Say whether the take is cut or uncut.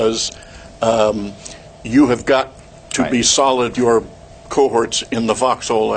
cut